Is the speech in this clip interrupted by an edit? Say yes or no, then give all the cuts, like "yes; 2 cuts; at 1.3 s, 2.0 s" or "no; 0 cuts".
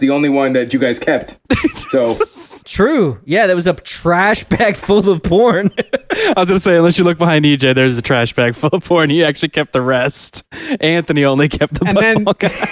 no; 0 cuts